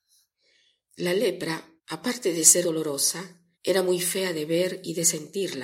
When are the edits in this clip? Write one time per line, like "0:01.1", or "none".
0:01.8
0:02.6
0:03.5